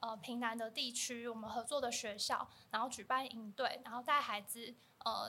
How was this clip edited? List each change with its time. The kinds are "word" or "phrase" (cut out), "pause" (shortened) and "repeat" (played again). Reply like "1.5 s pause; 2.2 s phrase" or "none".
none

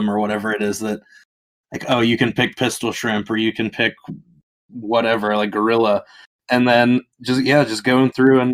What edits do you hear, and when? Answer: none

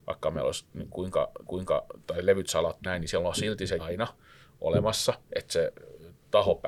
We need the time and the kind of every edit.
1.5 s repeat; 2.8 s word; 3.8 s word; 5.2 s pause

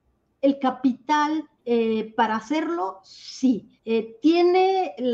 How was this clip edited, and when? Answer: 1.6 s pause; 3.8 s pause

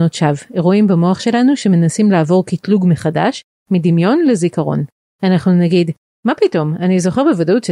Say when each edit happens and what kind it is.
none

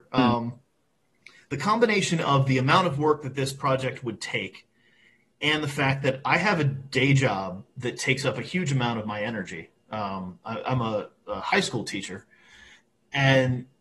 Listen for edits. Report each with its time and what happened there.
none

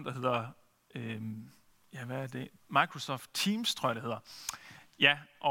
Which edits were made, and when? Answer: 1.7 s pause; 2.6 s pause

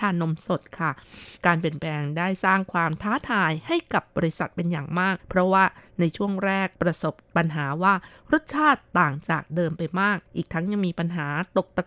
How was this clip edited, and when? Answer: 1.4 s pause; 5.2 s pause; 6.7 s pause; 10.3 s pause

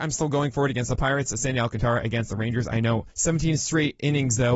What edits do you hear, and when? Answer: 3.1 s pause

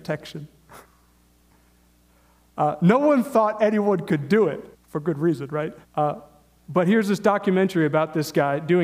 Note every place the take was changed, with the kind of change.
4.7 s pause; 5.8 s pause

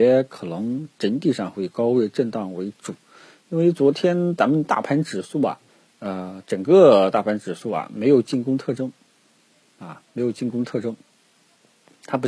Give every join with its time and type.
5.7 s pause

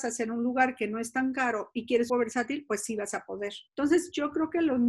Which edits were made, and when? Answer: 2.1 s phrase; 3.7 s pause

